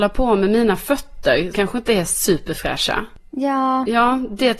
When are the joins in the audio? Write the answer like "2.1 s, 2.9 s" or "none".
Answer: 1.5 s